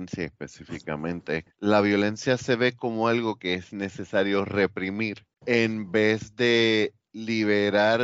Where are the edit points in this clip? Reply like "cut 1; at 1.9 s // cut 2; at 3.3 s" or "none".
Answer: cut 1; at 1.5 s // cut 2; at 5.3 s